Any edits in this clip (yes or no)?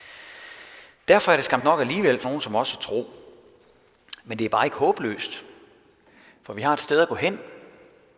yes